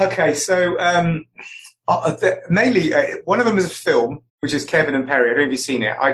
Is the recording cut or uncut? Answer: cut